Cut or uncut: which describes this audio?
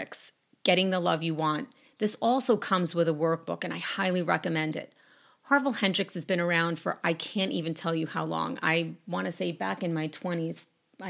uncut